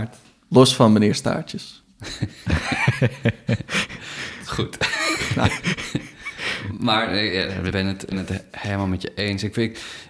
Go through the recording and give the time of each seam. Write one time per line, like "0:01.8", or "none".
0:07.7
0:08.1

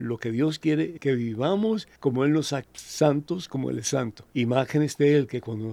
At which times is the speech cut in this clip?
0:01.0
0:02.0
0:02.6
0:04.3

